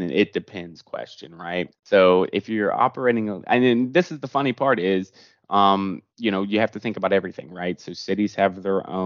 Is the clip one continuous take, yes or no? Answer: no